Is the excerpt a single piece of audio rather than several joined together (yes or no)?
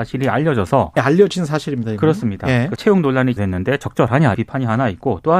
no